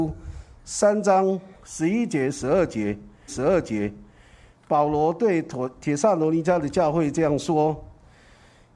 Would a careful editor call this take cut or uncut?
cut